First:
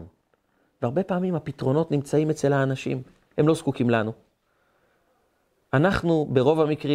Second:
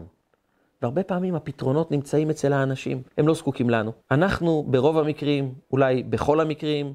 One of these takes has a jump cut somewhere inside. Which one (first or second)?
second